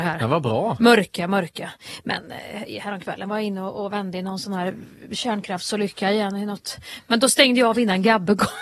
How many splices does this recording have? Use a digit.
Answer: 0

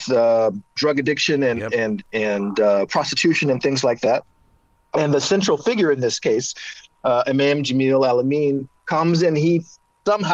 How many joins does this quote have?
0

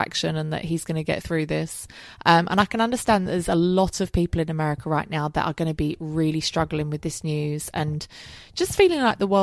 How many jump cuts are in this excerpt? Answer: 0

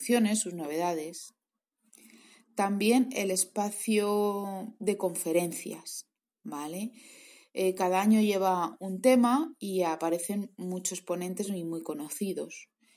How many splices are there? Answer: 0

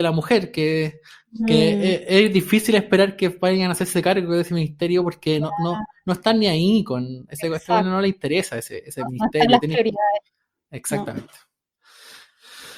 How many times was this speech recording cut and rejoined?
0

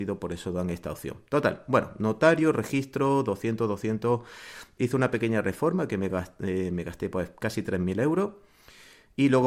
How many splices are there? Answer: 0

